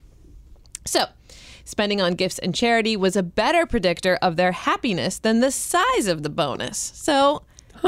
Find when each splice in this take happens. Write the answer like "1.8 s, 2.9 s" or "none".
none

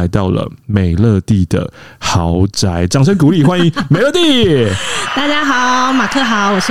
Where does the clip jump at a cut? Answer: none

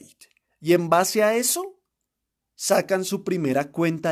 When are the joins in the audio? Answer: none

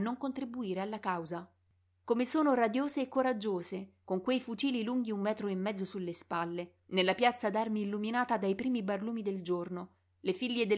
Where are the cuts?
none

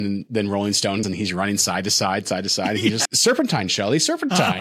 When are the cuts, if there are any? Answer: 1.0 s, 3.1 s

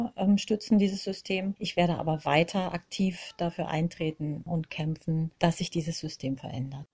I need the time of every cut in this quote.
none

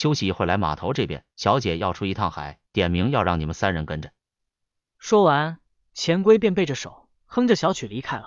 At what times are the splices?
1.3 s, 2.7 s, 7.1 s

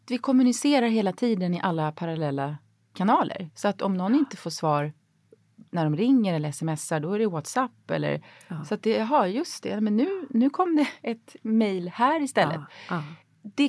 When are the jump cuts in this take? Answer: 5.7 s

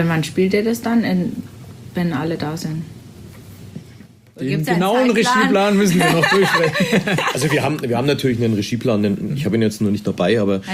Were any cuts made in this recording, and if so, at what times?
none

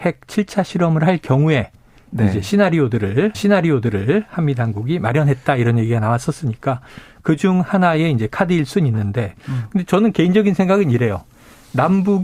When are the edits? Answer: 3.3 s

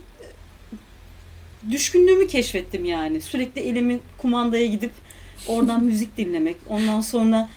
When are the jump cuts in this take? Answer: none

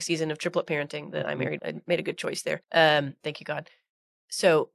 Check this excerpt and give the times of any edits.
1.6 s, 2.6 s

